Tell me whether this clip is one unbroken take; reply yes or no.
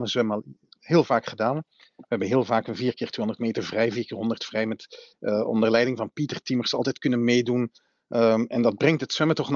yes